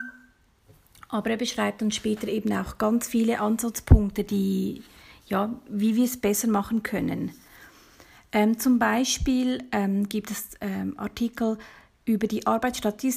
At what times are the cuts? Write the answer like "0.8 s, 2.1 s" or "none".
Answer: none

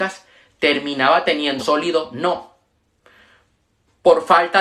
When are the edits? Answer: 1.6 s

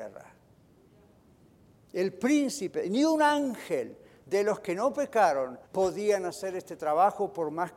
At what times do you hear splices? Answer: 5.6 s

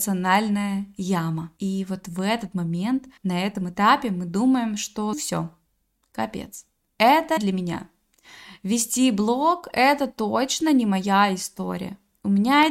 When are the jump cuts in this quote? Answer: 1.6 s, 3.2 s, 5.1 s, 7.4 s

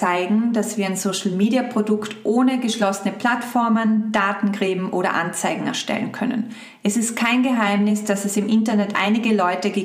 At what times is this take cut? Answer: none

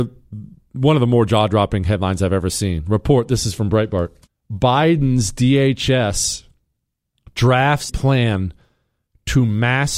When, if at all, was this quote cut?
4.3 s, 7.9 s

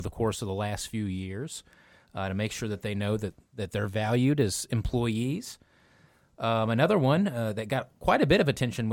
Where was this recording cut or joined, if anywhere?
none

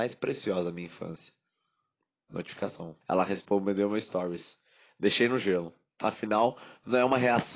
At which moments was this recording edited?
3.0 s

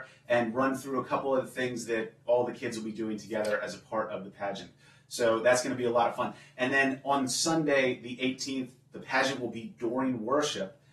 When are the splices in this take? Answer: none

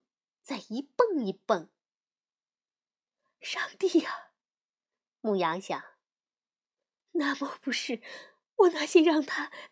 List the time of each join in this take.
none

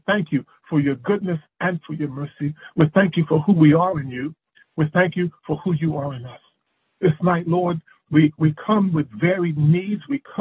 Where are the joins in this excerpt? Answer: none

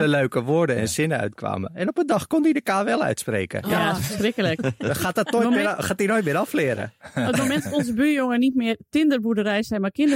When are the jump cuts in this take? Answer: none

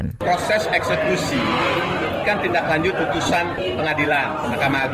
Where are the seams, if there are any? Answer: 2.2 s, 2.9 s

